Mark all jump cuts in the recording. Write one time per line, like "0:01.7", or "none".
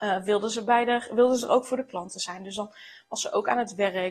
none